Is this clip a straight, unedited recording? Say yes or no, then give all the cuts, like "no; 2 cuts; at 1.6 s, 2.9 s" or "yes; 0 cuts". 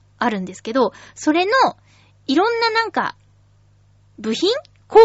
yes; 0 cuts